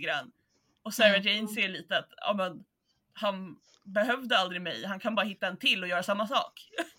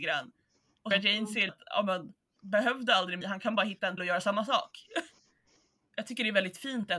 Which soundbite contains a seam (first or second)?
second